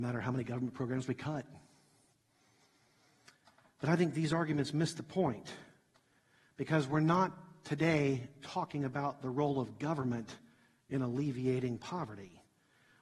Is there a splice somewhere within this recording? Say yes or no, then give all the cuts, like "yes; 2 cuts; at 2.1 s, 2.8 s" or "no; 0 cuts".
no; 0 cuts